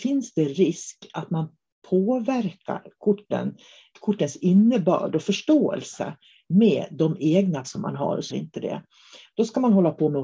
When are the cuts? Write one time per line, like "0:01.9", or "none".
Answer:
0:03.9
0:07.6
0:08.3